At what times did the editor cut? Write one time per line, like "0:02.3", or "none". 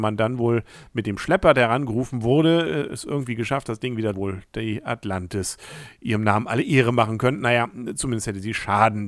0:04.1